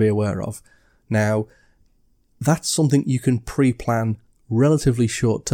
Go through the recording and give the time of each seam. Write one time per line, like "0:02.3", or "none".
none